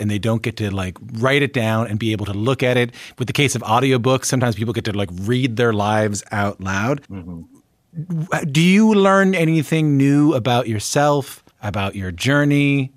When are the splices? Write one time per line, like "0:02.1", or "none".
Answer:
0:07.0
0:11.5